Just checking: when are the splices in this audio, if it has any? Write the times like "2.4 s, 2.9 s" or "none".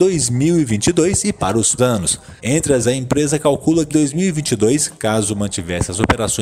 1.8 s, 2.4 s, 2.8 s, 3.9 s